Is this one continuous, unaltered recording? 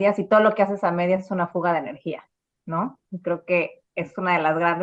yes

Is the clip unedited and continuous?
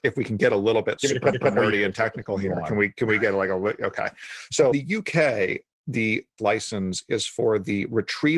no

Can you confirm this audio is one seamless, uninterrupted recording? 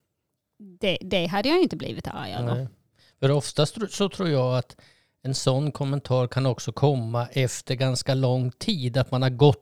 yes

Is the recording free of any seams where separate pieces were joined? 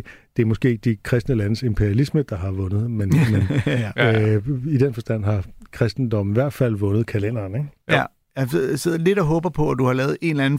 yes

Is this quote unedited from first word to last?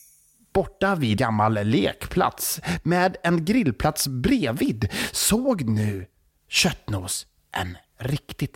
no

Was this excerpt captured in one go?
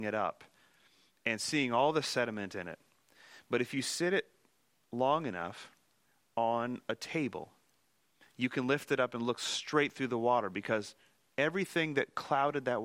yes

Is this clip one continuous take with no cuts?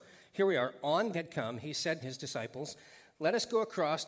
no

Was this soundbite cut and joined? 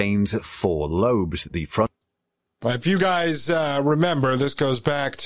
no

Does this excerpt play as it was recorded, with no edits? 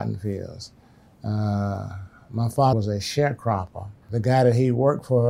no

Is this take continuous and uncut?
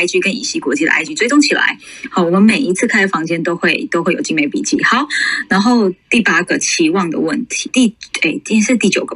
no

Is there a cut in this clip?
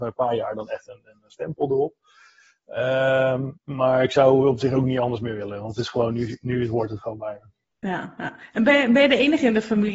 yes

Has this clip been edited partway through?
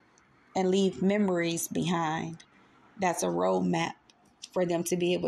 no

